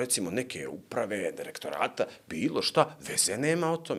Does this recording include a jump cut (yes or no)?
no